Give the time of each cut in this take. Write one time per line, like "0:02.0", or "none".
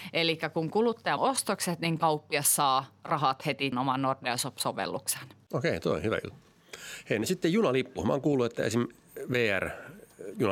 0:01.2
0:03.7